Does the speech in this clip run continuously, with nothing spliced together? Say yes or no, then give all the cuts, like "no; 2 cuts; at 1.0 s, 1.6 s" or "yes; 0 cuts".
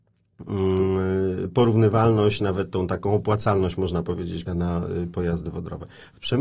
no; 1 cut; at 4.5 s